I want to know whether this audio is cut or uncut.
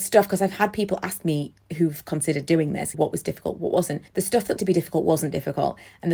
cut